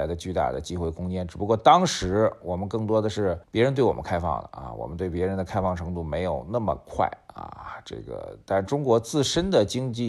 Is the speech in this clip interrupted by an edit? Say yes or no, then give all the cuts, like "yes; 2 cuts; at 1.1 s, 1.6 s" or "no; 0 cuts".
yes; 1 cut; at 3.4 s